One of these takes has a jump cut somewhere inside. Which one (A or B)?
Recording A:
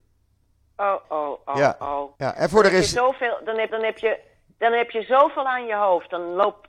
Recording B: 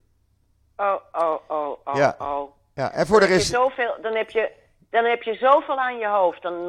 A